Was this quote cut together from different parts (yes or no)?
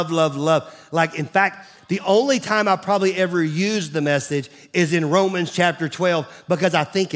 no